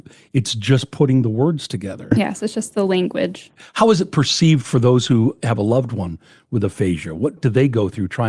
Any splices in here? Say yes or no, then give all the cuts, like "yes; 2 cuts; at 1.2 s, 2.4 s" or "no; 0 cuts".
no; 0 cuts